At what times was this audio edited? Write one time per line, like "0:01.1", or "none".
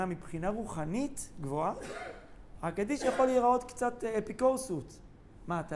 none

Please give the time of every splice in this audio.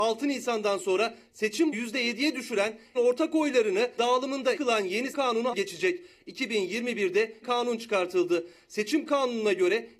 0:01.7
0:02.9
0:04.0
0:04.6
0:05.1
0:05.5
0:07.4

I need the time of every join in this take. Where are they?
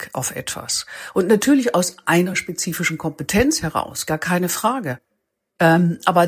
none

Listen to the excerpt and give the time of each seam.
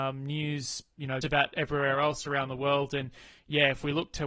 0:01.2

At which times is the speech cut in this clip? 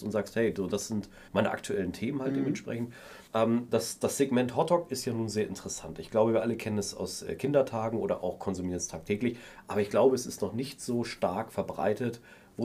0:01.3
0:03.3

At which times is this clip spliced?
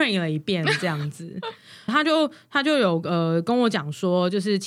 0:01.9

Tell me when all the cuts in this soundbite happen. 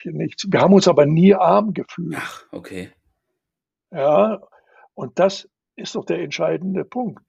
none

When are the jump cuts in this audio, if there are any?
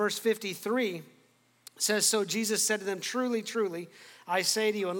none

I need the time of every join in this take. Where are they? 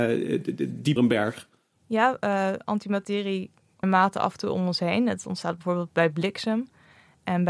0:01.0
0:03.8

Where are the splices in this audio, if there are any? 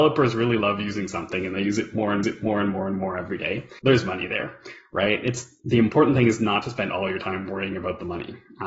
0:02.2
0:03.8
0:05.6

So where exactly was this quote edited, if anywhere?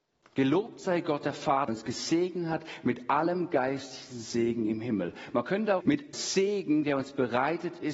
0:01.7
0:05.8
0:06.1

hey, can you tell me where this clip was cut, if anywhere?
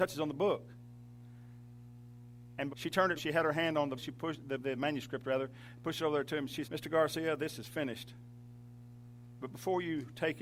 0:02.7
0:03.2
0:04.0
0:04.6
0:06.6

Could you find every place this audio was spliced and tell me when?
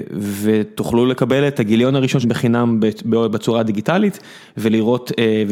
0:02.2

